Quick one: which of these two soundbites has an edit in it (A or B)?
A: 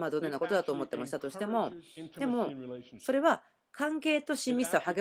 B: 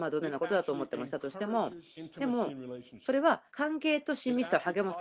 B